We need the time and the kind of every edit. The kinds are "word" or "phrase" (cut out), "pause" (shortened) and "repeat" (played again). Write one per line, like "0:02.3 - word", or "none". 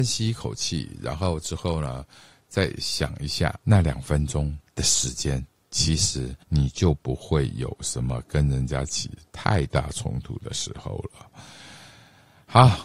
0:03.6 - pause
0:04.7 - pause
0:06.4 - pause